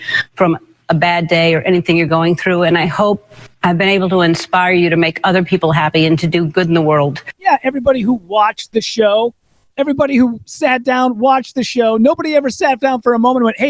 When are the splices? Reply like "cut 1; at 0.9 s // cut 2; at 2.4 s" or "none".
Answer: none